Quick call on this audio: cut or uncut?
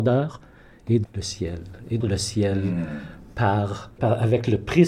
cut